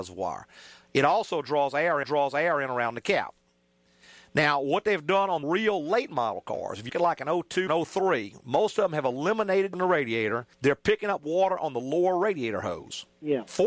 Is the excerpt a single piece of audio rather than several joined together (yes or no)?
no